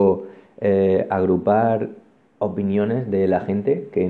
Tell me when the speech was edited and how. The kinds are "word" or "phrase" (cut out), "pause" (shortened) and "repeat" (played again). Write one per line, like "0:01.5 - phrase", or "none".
none